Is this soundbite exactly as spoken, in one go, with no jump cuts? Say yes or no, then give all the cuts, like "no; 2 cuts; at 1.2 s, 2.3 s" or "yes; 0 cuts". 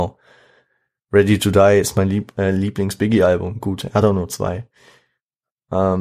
yes; 0 cuts